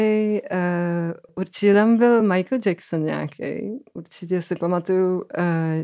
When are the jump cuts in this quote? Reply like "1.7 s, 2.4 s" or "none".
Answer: none